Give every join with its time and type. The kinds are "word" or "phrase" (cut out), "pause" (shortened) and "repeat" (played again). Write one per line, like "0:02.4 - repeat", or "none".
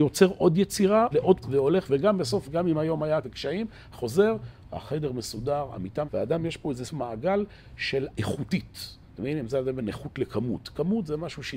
0:01.1 - word
0:01.4 - word
0:01.9 - word
0:02.4 - word
0:03.2 - word
0:03.9 - word
0:06.1 - word
0:06.8 - word
0:08.1 - word